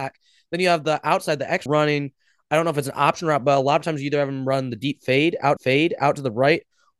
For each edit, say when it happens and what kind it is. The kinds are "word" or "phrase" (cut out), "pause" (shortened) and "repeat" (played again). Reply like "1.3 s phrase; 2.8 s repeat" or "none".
1.7 s word; 5.6 s repeat